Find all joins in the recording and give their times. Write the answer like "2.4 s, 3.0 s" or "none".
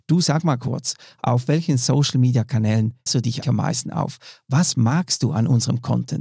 3.1 s, 3.4 s